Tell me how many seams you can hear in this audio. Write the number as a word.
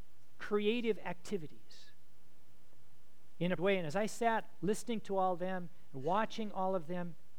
one